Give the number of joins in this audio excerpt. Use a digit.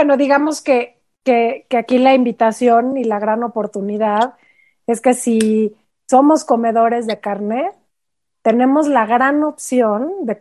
0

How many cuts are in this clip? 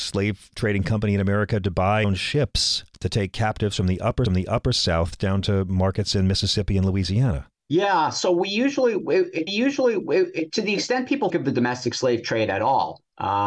5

